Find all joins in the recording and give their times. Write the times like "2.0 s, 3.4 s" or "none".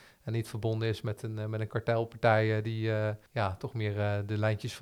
3.3 s